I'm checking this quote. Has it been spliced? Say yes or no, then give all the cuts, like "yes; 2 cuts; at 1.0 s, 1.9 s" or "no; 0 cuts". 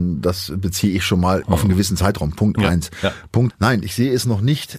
yes; 2 cuts; at 1.4 s, 3.5 s